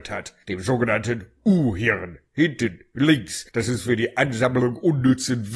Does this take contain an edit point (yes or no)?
no